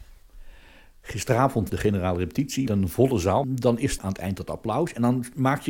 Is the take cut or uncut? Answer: cut